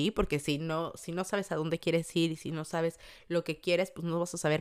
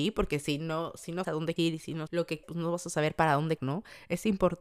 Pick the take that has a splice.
second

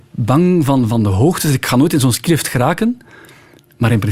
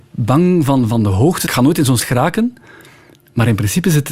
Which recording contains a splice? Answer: second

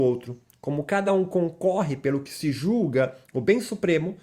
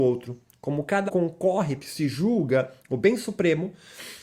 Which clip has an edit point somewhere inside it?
second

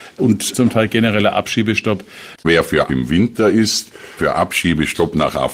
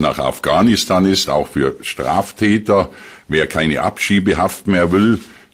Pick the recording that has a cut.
first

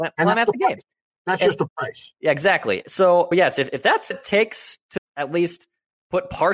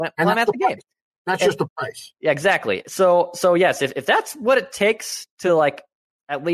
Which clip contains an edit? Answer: first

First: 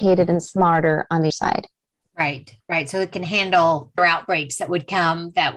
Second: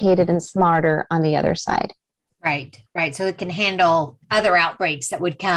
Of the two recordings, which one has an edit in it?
first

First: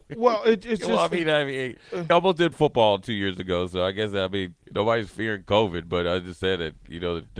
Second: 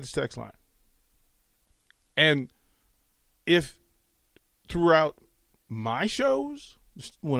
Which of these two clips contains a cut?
first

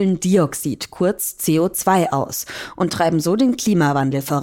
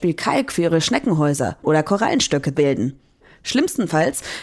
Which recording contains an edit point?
second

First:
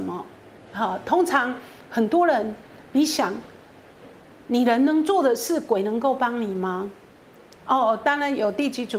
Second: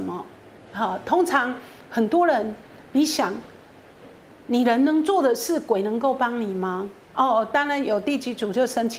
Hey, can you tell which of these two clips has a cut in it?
second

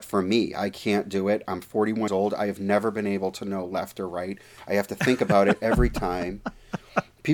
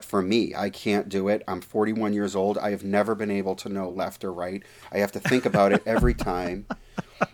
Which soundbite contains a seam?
first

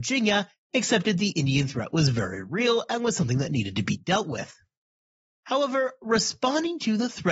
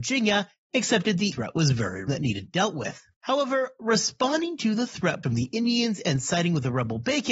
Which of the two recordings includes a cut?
second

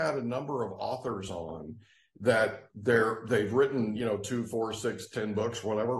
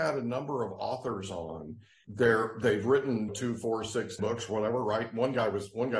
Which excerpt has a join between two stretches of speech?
second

